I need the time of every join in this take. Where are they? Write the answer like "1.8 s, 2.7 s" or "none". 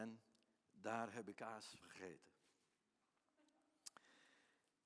1.3 s, 1.8 s